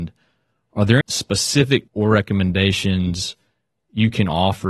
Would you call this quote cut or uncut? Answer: cut